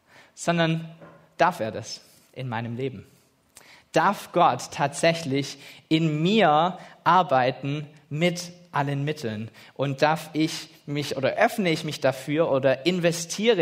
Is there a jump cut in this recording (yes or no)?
no